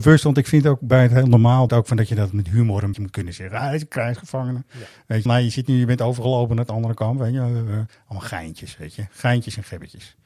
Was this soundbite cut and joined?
yes; 3 cuts; at 1.7 s, 2.9 s, 5.3 s

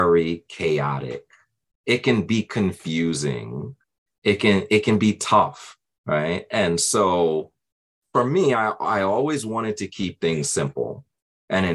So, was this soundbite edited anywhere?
no; 0 cuts

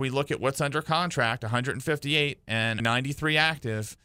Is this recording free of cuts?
no; 1 cut; at 2.8 s

